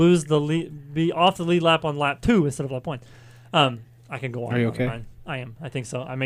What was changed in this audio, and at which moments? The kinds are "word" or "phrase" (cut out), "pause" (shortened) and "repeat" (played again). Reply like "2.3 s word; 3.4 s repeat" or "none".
none